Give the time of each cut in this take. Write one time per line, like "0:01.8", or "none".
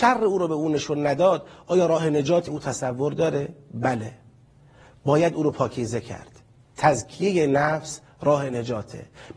0:02.5